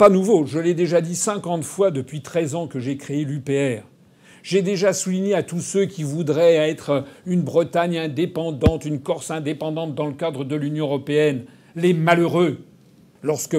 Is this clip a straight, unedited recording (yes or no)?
yes